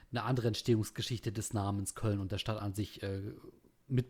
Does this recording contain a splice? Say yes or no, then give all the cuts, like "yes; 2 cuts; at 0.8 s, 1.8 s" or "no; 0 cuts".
no; 0 cuts